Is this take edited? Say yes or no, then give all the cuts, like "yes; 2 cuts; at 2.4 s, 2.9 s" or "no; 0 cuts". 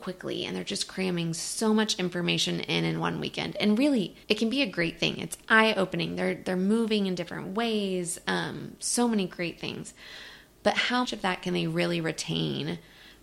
yes; 2 cuts; at 4.2 s, 11.0 s